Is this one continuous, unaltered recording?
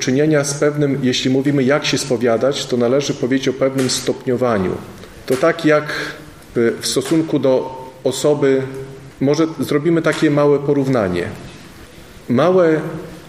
no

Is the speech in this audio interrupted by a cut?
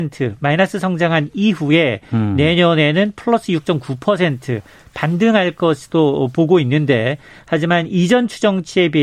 no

